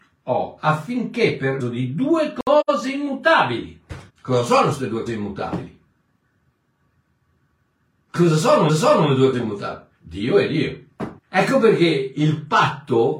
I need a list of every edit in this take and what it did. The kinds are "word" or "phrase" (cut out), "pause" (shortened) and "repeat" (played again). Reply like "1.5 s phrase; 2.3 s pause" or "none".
1.6 s word; 4.1 s pause; 5.1 s word; 8.7 s repeat; 9.3 s word; 9.9 s pause; 11.2 s pause

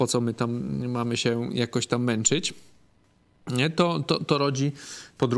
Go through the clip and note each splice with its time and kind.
none

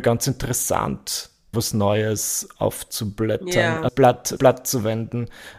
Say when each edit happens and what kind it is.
1.5 s word; 3.9 s word; 4.4 s word

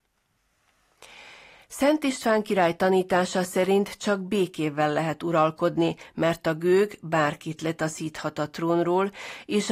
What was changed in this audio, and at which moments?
none

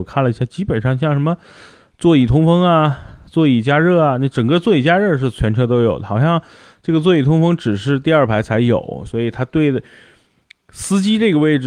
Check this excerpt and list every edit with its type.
none

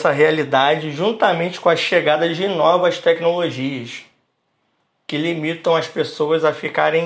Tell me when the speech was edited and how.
none

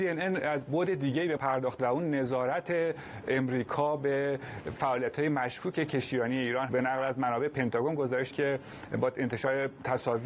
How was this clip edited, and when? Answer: 1.4 s word; 6.7 s word; 8.3 s word

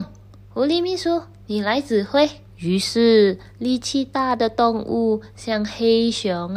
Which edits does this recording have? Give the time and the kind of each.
2.5 s pause

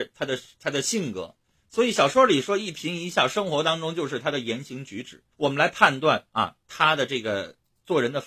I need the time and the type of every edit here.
5.3 s pause

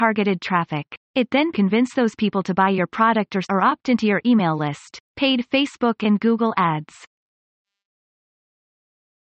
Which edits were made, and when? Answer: 1.0 s pause; 1.5 s phrase; 3.4 s word; 5.1 s pause

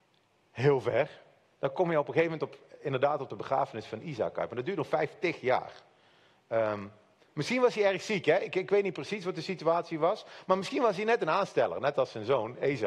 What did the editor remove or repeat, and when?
none

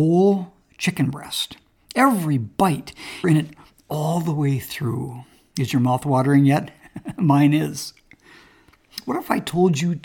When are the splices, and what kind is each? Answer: 3.2 s phrase

